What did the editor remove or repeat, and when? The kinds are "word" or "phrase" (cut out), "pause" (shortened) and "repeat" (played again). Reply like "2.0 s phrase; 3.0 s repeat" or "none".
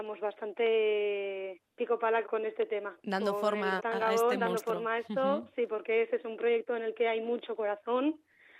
1.7 s pause; 2.2 s word; 3.8 s word